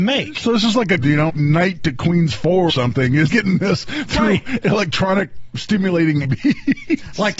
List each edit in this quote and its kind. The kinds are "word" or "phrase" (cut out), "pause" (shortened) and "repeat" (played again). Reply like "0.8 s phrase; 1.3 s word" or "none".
1.0 s word; 1.3 s word; 2.7 s word; 3.3 s word; 6.2 s word